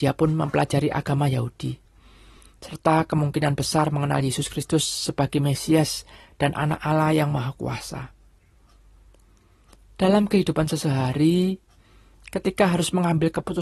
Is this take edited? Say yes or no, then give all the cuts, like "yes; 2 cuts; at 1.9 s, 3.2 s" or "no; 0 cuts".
no; 0 cuts